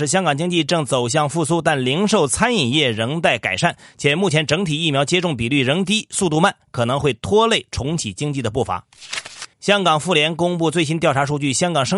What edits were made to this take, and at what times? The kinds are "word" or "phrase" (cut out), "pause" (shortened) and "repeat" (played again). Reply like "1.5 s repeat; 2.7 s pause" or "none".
9.5 s pause